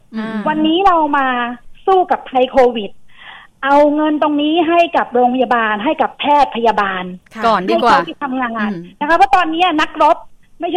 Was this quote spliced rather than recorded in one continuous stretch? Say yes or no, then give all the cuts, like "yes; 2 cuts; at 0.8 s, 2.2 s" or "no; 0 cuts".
no; 0 cuts